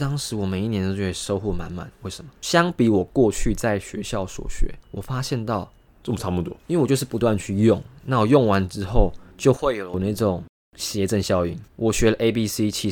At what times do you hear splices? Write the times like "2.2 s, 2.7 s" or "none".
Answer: 4.8 s, 5.9 s, 6.6 s, 9.3 s, 11.7 s